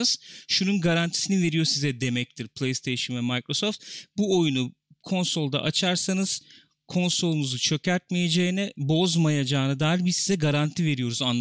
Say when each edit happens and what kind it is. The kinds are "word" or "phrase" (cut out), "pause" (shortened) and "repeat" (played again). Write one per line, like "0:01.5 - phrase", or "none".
none